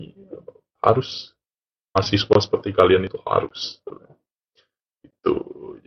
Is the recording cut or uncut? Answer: uncut